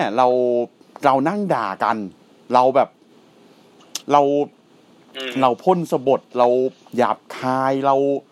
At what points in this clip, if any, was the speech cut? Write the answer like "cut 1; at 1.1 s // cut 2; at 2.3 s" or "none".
cut 1; at 4.0 s

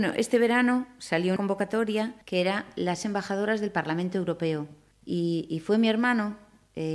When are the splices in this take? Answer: cut 1; at 1.4 s // cut 2; at 2.2 s // cut 3; at 3.0 s

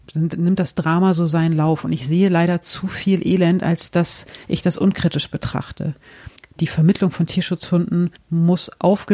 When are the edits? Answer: cut 1; at 4.4 s // cut 2; at 6.4 s // cut 3; at 8.2 s

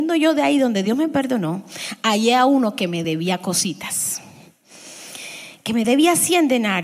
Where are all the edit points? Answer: none

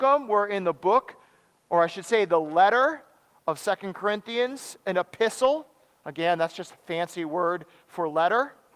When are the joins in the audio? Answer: none

